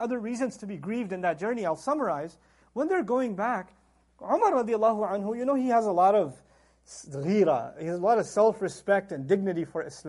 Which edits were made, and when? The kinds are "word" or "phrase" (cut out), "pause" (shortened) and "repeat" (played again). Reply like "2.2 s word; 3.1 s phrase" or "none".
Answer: none